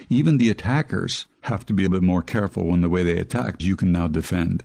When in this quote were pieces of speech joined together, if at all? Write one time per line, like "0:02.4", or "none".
0:01.3
0:01.9
0:03.6